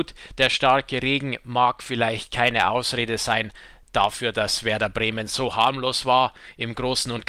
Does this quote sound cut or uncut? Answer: uncut